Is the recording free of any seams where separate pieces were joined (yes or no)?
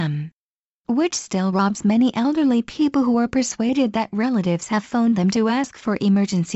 yes